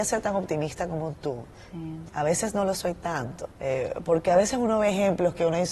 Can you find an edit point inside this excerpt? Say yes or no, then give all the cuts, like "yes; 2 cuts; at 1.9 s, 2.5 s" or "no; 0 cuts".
yes; 2 cuts; at 2.1 s, 3.5 s